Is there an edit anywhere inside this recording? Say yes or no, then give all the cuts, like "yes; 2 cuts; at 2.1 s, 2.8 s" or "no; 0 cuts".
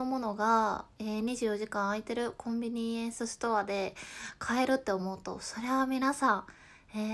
no; 0 cuts